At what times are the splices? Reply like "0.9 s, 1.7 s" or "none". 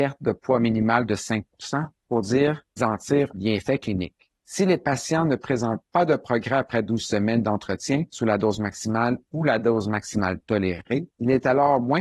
2.8 s, 3.3 s